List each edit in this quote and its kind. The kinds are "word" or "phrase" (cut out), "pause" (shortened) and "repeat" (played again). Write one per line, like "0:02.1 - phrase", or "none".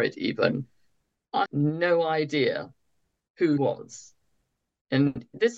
0:01.5 - word
0:03.6 - word